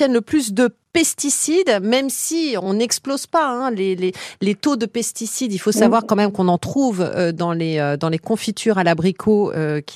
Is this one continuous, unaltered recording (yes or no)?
yes